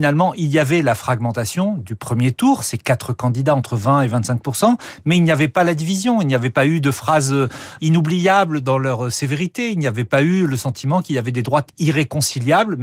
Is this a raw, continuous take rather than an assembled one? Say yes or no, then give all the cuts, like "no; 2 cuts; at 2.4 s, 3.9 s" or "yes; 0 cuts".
no; 1 cut; at 7.8 s